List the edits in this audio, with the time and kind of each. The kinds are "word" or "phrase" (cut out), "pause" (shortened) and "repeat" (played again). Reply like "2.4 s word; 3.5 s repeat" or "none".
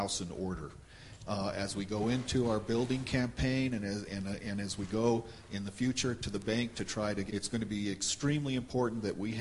4.1 s word; 7.3 s phrase